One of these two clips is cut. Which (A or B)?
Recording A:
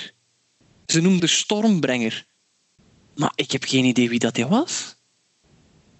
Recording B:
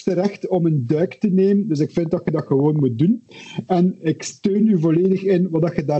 A